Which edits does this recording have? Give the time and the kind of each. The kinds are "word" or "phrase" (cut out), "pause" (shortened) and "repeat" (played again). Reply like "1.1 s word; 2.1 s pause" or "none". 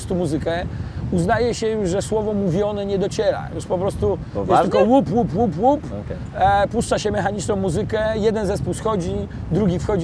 none